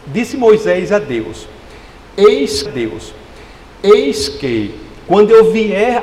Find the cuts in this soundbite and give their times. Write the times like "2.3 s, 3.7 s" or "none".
2.7 s

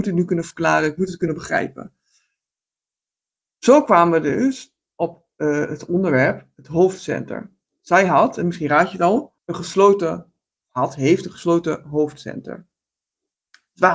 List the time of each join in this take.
9.4 s

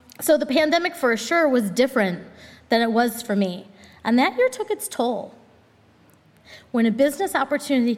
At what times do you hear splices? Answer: none

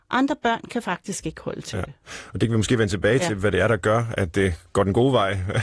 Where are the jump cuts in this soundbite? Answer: none

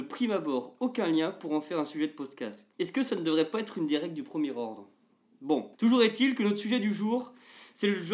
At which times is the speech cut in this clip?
2.7 s, 5.7 s

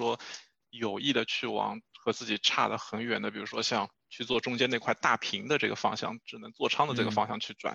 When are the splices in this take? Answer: 3.9 s

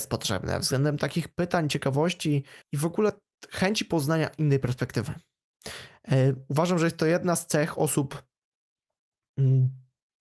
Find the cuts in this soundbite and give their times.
2.6 s

